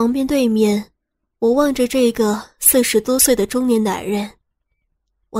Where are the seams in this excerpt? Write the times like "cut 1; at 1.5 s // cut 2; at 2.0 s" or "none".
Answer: none